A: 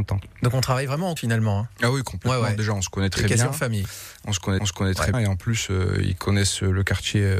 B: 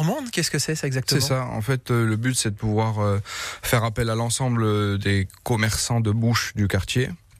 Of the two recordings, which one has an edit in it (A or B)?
A